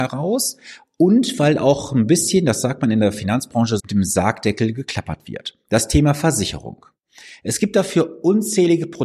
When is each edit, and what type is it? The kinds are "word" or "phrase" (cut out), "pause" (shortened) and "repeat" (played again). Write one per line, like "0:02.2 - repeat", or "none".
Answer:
0:03.8 - word